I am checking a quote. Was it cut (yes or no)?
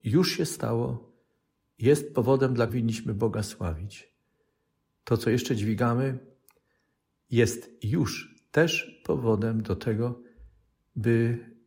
yes